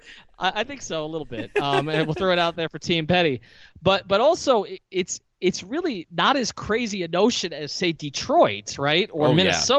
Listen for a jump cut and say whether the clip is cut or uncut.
uncut